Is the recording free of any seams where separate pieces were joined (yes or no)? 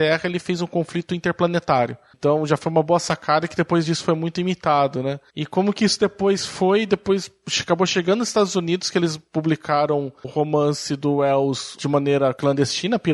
yes